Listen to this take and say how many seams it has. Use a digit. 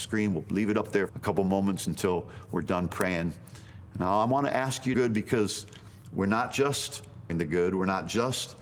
3